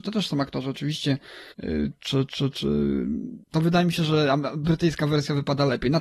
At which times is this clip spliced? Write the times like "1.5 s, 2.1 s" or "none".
1.5 s, 3.4 s